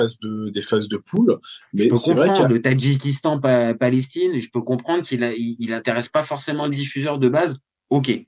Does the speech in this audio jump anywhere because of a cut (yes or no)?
no